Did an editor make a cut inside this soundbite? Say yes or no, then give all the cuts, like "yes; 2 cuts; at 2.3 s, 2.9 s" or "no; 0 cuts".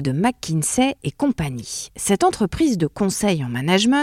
no; 0 cuts